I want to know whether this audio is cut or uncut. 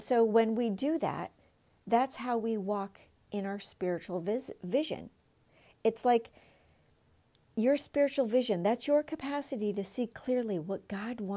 uncut